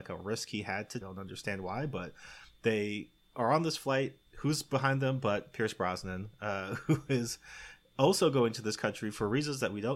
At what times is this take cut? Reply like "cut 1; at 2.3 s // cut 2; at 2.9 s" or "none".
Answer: cut 1; at 1.0 s // cut 2; at 4.3 s